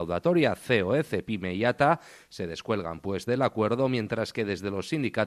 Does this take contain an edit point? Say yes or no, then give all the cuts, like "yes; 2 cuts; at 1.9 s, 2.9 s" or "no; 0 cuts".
no; 0 cuts